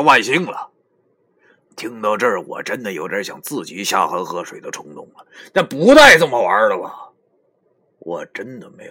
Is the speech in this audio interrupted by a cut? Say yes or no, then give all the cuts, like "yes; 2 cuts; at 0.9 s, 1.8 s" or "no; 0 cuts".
no; 0 cuts